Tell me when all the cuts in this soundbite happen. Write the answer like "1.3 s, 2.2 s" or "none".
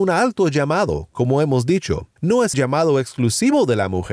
2.2 s, 2.5 s